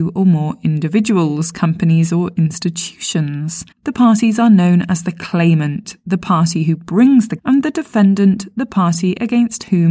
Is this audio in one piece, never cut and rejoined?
no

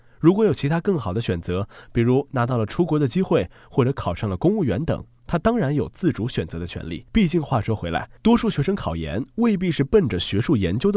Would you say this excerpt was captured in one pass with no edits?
no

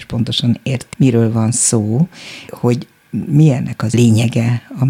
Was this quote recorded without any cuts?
no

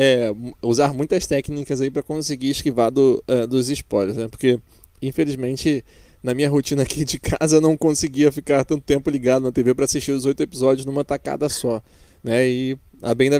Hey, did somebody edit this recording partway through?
no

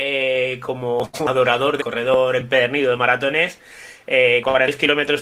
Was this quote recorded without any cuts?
no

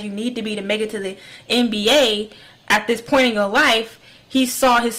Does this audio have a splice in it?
no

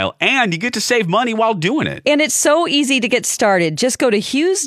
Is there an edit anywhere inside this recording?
no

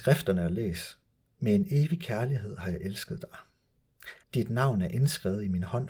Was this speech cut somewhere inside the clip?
yes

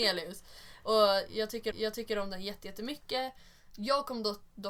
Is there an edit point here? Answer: yes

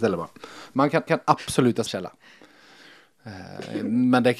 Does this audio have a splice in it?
yes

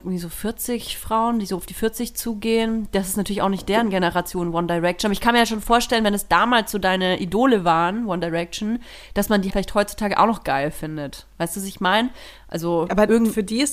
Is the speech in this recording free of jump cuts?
no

